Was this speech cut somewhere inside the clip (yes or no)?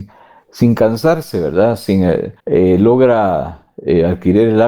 yes